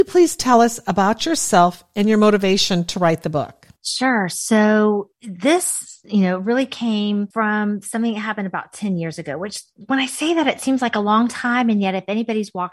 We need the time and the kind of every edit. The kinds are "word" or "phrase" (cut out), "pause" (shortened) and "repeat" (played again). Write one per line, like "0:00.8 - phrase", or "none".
0:03.8 - pause